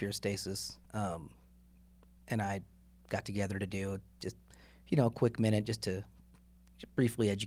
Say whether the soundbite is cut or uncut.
uncut